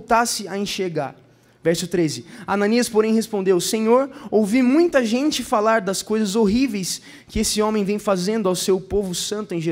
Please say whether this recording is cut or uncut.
uncut